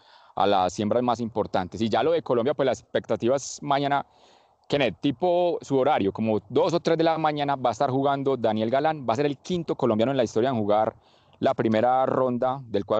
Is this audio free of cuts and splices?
yes; 0 cuts

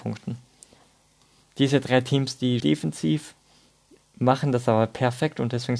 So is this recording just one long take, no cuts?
no; 1 cut; at 2.6 s

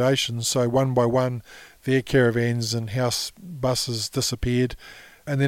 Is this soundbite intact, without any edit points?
yes; 0 cuts

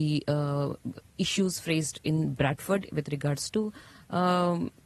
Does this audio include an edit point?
yes; 1 cut; at 1.1 s

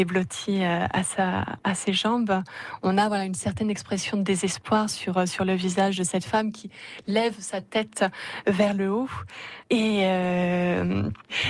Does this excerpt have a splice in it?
no; 0 cuts

